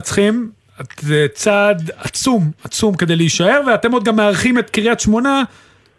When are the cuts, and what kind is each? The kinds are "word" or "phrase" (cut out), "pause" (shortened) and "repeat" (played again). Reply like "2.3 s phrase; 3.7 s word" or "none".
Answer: none

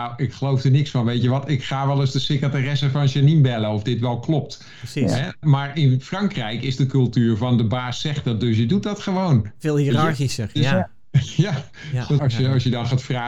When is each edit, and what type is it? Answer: 5.4 s word; 12.2 s word

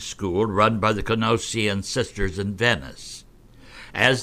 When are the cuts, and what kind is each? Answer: none

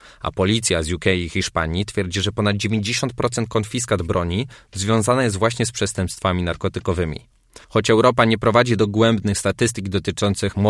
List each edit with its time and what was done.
7.6 s pause

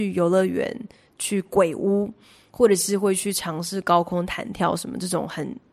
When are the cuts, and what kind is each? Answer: none

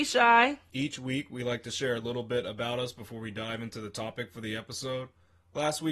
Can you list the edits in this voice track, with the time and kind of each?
none

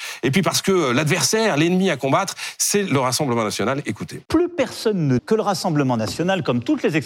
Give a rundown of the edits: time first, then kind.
4.3 s pause; 5.2 s word

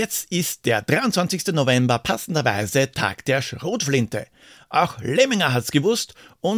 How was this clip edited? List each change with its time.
none

